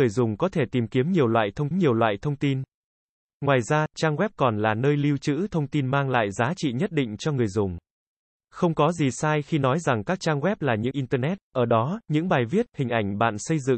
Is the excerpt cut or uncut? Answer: cut